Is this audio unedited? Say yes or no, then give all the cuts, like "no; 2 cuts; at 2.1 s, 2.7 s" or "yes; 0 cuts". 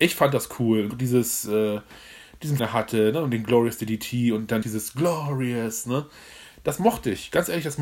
no; 3 cuts; at 0.9 s, 2.6 s, 4.6 s